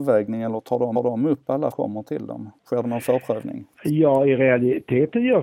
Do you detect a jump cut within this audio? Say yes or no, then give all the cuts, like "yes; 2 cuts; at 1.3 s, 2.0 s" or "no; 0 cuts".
yes; 4 cuts; at 0.9 s, 1.7 s, 2.6 s, 3.7 s